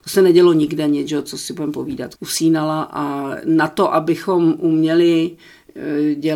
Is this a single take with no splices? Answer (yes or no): no